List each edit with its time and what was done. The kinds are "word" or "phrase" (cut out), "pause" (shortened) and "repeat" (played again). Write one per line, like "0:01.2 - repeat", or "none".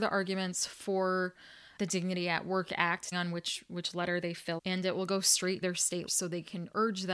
0:01.8 - word
0:03.1 - word
0:04.6 - word
0:05.6 - word
0:06.1 - word